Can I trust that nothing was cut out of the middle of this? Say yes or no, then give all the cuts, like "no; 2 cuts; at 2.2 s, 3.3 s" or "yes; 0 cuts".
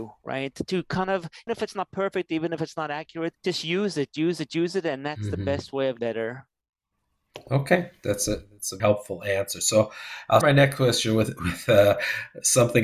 no; 5 cuts; at 1.5 s, 3.4 s, 6.0 s, 8.8 s, 10.4 s